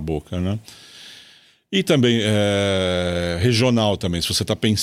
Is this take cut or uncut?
uncut